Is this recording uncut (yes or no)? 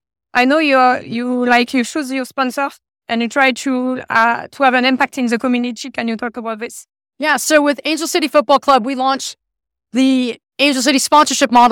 yes